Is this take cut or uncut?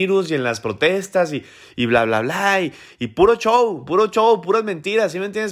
uncut